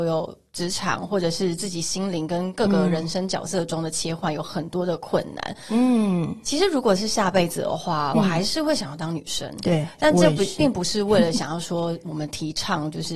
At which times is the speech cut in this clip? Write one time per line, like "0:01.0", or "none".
0:08.1